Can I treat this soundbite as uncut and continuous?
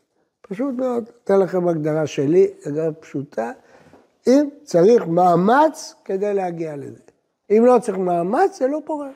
yes; 0 cuts

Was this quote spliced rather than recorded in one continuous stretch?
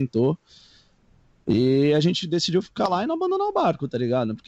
no; 0 cuts

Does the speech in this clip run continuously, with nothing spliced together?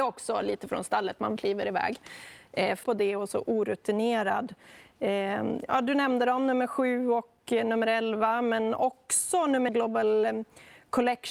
no; 3 cuts; at 1.4 s, 2.8 s, 9.7 s

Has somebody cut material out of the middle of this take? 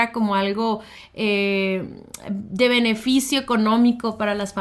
no; 0 cuts

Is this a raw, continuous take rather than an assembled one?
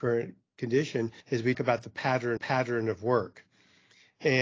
no; 3 cuts; at 1.2 s, 1.5 s, 2.4 s

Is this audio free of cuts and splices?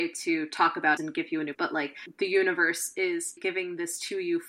no; 3 cuts; at 1.0 s, 1.5 s, 3.4 s

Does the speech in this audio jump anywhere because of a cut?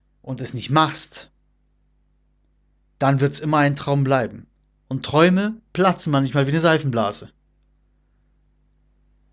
no; 0 cuts

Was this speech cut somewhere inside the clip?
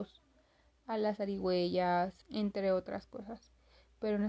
yes; 1 cut; at 2.2 s

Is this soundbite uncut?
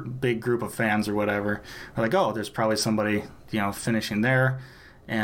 yes; 0 cuts

